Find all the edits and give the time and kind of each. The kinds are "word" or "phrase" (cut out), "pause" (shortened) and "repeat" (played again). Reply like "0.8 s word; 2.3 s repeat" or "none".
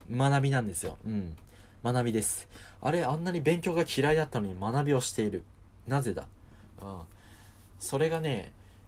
none